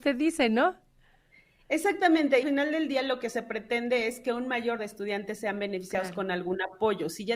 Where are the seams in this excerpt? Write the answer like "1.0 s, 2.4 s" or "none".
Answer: 2.4 s, 4.8 s